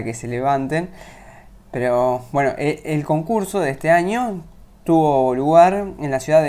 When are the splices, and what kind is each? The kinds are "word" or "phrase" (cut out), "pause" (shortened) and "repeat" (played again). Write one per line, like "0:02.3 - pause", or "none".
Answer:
0:01.6 - pause